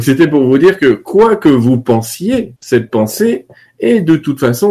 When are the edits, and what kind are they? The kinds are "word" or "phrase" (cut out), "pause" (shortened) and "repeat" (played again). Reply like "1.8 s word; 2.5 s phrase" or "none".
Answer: 2.6 s pause

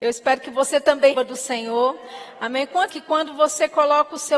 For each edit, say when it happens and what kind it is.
1.1 s word; 2.9 s word

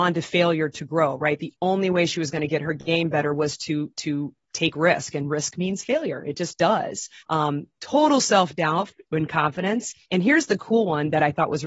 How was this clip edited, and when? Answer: 7.2 s pause; 10.0 s pause

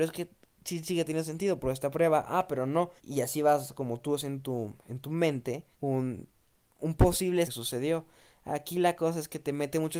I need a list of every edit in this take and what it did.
3.0 s pause; 5.7 s pause; 7.4 s phrase

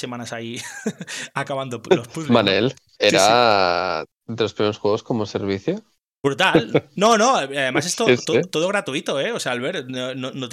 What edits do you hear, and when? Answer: none

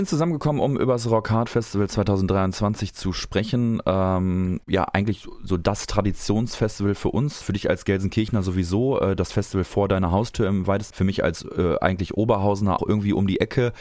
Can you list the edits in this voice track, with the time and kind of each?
4.6 s pause; 7.4 s word; 10.9 s word; 12.8 s word

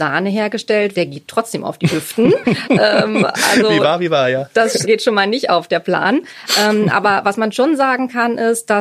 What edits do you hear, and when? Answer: 0.9 s word; 4.8 s word

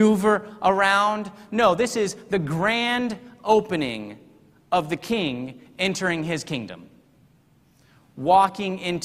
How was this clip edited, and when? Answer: none

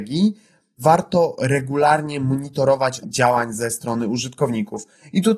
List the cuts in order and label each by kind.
3.0 s word

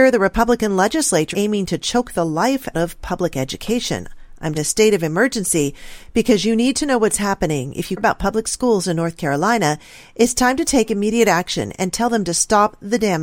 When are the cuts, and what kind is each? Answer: 1.3 s word; 2.7 s word; 4.5 s word; 8.0 s word

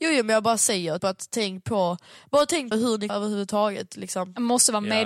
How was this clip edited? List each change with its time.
1.0 s word; 2.7 s word; 3.1 s word

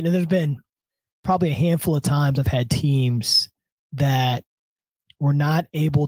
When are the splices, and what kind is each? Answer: 3.7 s pause

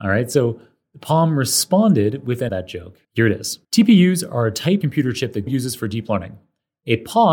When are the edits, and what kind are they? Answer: 2.5 s phrase; 3.0 s pause; 3.6 s pause; 4.8 s word; 5.5 s word

